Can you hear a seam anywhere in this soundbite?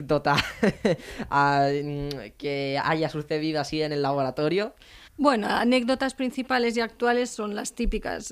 yes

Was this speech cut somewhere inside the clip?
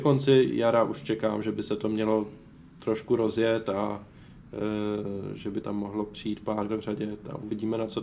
yes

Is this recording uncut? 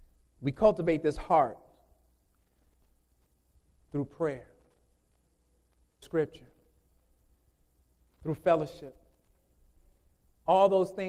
no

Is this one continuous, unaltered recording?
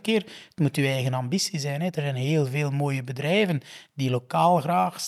yes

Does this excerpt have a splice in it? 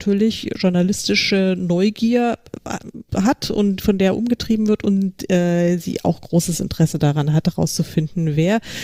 yes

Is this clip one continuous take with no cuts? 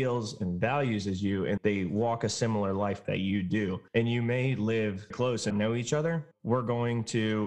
no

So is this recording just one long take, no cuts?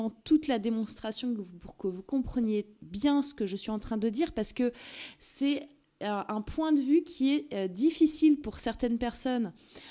yes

